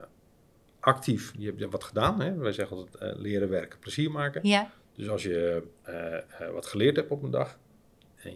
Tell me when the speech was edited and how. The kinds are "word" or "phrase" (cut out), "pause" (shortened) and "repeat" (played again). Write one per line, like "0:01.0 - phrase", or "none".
0:05.8 - pause